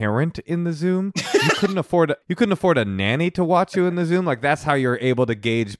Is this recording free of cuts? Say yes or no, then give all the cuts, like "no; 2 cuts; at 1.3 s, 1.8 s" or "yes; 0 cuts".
no; 1 cut; at 2.2 s